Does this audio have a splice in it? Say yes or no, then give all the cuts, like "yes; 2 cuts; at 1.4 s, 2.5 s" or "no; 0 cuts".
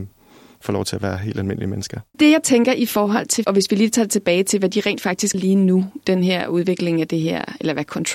yes; 2 cuts; at 3.4 s, 5.3 s